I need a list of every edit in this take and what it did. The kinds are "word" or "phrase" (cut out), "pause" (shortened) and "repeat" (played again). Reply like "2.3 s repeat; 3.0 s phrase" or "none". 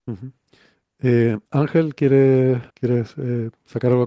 1.5 s pause; 2.7 s pause

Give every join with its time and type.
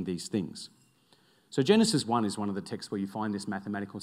none

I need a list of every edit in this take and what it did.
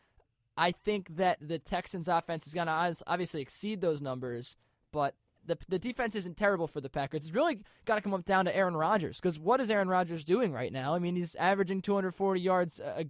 none

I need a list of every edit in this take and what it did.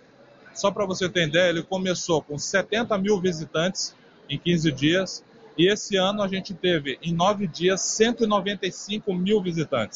none

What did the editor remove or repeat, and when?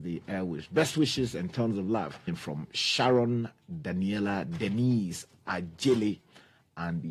2.3 s word

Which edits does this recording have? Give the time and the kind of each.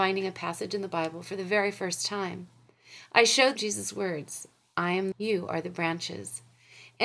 3.6 s word; 5.1 s phrase

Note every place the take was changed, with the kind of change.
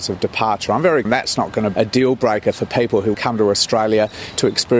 1.0 s word; 1.7 s word; 3.1 s word

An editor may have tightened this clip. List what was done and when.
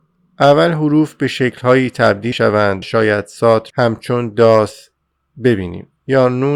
2.3 s word; 2.8 s word; 3.7 s word

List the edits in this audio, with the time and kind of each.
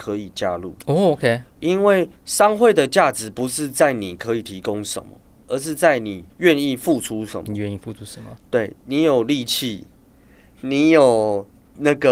1.6 s word; 2.2 s pause; 6.3 s pause

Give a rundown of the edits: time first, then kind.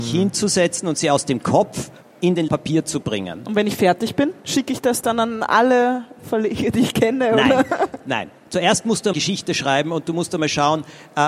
2.0 s pause; 2.5 s phrase; 4.4 s pause; 9.1 s word

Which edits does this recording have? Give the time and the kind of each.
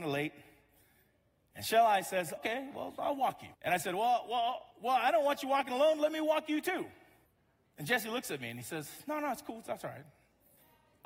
2.4 s word; 3.5 s pause; 4.7 s pause; 7.3 s pause

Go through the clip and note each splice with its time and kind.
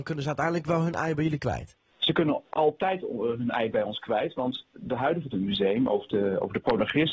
1.9 s pause; 4.7 s pause; 5.3 s phrase

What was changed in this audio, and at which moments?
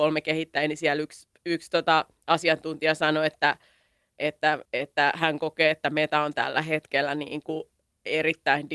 4.7 s pause

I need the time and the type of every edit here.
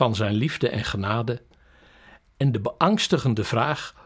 none

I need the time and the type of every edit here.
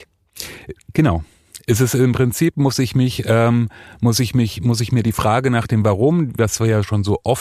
none

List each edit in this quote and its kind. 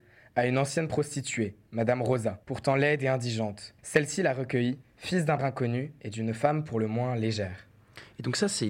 2.4 s pause; 3.8 s pause; 4.8 s word; 5.4 s word

